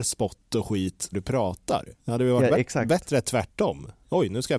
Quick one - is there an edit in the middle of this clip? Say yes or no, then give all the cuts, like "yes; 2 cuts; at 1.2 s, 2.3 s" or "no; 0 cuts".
yes; 2 cuts; at 1.1 s, 2.0 s